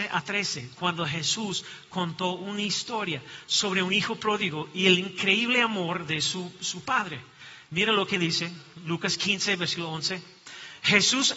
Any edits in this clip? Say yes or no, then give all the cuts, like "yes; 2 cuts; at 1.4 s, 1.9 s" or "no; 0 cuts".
no; 0 cuts